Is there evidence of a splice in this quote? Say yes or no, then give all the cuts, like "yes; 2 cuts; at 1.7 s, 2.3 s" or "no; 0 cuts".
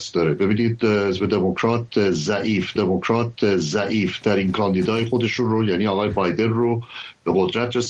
yes; 1 cut; at 2.8 s